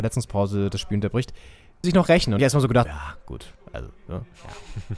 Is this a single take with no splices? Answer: no; 3 cuts; at 1.8 s, 2.4 s, 2.8 s

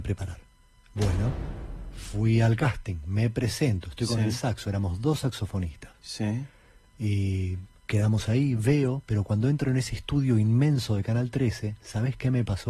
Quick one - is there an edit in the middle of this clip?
no; 0 cuts

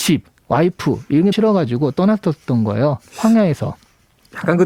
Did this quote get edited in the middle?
yes; 1 cut; at 1.3 s

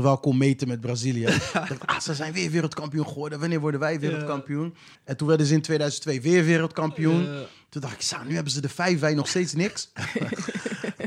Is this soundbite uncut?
no; 1 cut; at 4.9 s

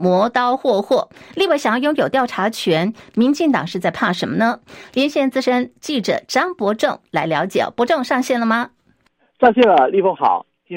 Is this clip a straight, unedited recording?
yes; 0 cuts

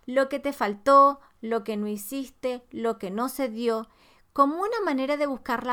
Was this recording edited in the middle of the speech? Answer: no; 0 cuts

